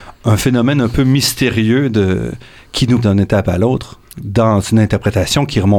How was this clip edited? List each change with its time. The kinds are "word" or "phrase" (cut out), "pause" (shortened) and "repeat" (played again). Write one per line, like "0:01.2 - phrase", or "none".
0:03.0 - phrase